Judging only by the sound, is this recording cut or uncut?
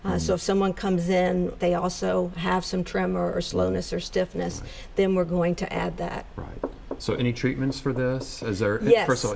cut